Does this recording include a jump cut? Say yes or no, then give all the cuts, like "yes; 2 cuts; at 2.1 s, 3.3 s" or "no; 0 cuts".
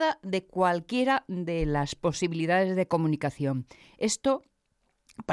no; 0 cuts